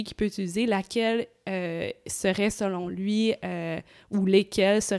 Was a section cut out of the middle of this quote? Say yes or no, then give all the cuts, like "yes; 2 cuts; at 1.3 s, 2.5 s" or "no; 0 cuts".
no; 0 cuts